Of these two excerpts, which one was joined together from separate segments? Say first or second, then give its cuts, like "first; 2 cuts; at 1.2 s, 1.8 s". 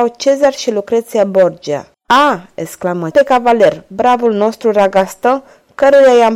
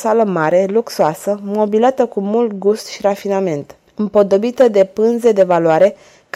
first; 2 cuts; at 1.9 s, 3.1 s